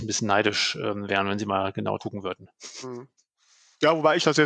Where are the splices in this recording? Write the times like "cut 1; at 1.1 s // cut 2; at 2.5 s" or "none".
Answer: cut 1; at 2.0 s